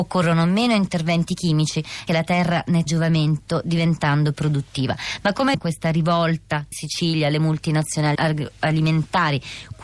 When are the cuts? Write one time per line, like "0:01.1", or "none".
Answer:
0:02.1
0:02.9
0:04.3
0:05.5
0:06.7
0:08.1